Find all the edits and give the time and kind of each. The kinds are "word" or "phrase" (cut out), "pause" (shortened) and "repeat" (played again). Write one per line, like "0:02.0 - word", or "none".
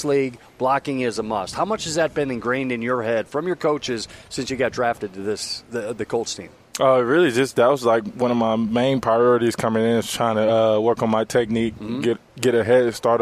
none